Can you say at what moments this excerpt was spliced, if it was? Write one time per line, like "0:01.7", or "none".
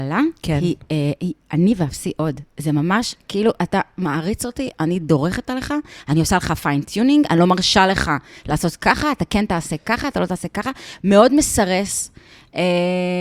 none